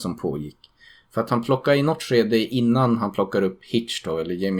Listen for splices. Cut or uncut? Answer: uncut